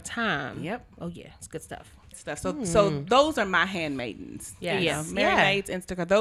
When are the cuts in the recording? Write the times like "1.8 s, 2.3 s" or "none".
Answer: 2.1 s